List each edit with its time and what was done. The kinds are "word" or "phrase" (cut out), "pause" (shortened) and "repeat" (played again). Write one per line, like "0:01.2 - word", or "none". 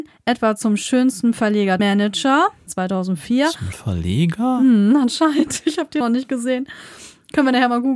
0:01.8 - phrase
0:02.7 - word
0:03.7 - word
0:06.0 - word